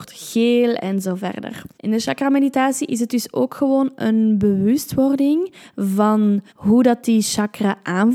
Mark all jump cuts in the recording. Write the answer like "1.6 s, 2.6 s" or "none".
1.0 s, 1.7 s, 6.5 s